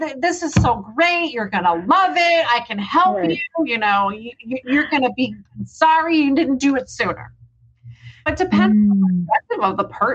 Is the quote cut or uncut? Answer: cut